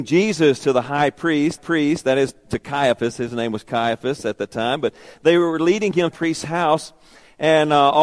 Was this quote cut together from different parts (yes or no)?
yes